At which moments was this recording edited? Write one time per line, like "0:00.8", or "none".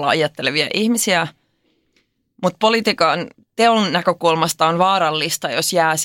none